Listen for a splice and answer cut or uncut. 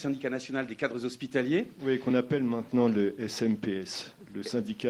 uncut